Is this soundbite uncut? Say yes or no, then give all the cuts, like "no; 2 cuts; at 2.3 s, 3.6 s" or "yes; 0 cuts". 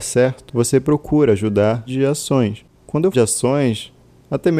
no; 2 cuts; at 1.9 s, 3.1 s